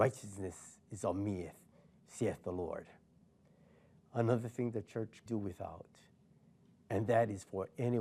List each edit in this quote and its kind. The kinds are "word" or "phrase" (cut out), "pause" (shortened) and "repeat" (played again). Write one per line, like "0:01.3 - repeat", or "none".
0:05.3 - word